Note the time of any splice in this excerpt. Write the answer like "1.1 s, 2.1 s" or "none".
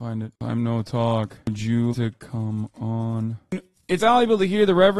1.9 s, 4.0 s